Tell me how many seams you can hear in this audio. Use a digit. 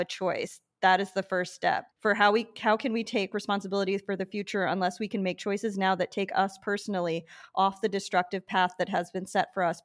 1